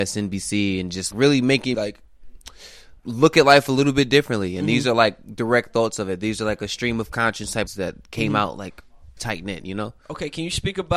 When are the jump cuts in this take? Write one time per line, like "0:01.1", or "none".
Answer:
0:01.1
0:01.7
0:03.0
0:07.7
0:09.2